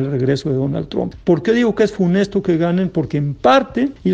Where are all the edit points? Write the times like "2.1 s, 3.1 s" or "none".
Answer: none